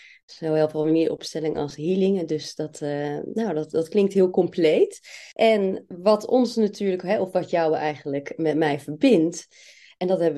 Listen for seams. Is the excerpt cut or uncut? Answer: cut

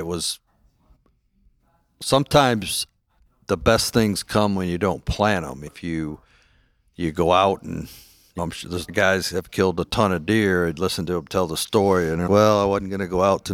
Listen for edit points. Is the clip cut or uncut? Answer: cut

